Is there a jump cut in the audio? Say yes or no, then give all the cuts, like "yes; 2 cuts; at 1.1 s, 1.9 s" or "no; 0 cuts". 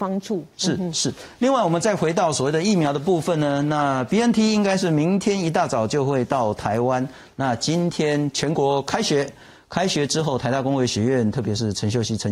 no; 0 cuts